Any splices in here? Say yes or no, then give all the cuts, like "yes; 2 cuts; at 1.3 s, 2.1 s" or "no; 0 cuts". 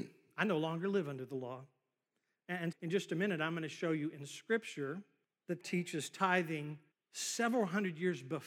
yes; 4 cuts; at 2.7 s, 5.2 s, 5.6 s, 6.9 s